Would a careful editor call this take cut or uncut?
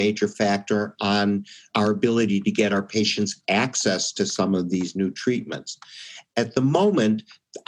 uncut